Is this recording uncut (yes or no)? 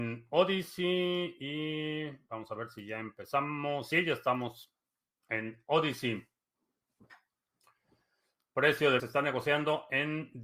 no